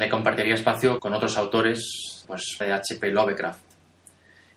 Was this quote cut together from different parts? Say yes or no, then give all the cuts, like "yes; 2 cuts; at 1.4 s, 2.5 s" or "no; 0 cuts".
yes; 3 cuts; at 1.0 s, 2.2 s, 2.6 s